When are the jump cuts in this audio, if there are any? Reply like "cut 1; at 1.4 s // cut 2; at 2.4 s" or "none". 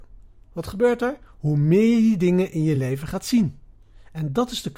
none